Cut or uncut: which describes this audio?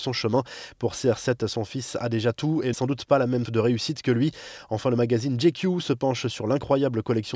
cut